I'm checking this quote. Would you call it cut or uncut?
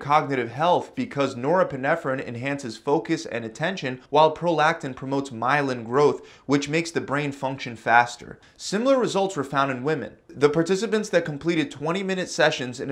cut